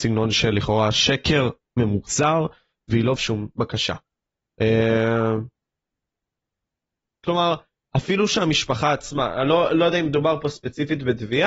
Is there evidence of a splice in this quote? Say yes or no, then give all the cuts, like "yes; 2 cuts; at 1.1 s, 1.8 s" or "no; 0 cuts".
yes; 1 cut; at 3.2 s